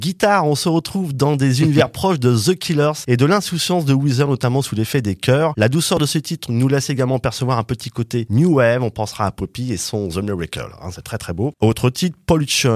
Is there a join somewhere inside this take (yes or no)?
no